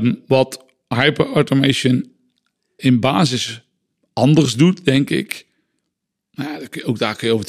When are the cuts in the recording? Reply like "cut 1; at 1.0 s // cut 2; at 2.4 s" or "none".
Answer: cut 1; at 2.8 s